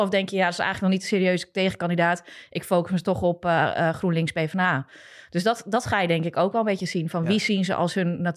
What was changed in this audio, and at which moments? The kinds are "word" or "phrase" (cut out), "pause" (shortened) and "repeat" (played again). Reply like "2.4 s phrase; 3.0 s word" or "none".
none